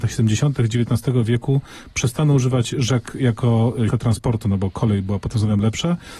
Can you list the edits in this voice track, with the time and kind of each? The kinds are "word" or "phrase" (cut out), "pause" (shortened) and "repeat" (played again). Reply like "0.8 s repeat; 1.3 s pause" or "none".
3.9 s word